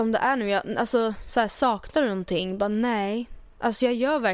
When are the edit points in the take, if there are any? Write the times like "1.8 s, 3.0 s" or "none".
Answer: none